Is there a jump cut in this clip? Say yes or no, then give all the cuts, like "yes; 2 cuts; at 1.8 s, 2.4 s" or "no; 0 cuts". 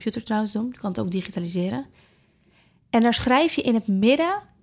no; 0 cuts